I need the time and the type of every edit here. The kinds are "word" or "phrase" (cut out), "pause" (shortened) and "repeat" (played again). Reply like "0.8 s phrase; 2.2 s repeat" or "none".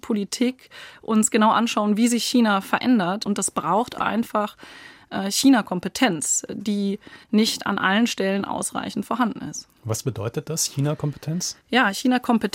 7.2 s pause; 11.6 s pause